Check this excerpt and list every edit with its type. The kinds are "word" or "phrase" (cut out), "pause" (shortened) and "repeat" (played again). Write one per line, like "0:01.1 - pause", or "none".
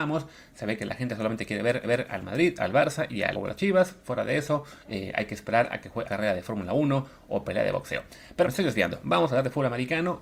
0:01.8 - repeat
0:03.3 - word
0:04.8 - pause
0:06.0 - word
0:08.4 - word